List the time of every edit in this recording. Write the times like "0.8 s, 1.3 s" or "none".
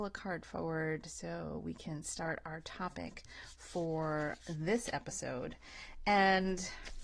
4.4 s